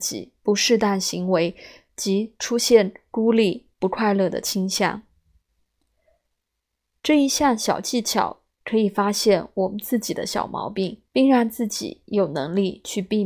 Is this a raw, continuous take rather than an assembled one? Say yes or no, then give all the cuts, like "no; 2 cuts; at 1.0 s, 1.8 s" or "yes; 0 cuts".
no; 1 cut; at 11.1 s